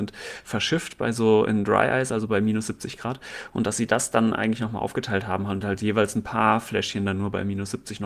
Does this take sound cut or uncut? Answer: uncut